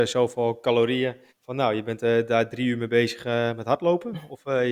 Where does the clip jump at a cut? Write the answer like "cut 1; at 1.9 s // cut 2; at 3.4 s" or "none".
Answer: cut 1; at 1.3 s